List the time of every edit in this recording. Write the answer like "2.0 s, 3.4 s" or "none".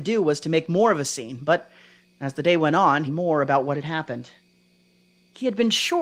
3.1 s

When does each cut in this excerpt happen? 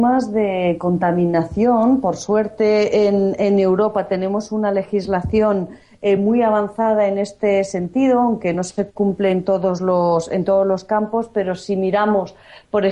none

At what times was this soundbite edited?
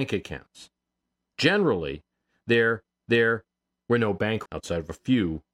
3.1 s, 4.5 s

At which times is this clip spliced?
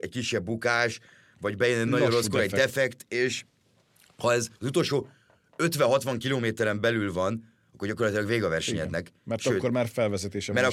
4.5 s

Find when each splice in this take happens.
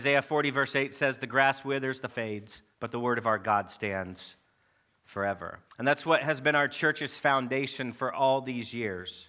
2.1 s, 2.7 s, 5.7 s

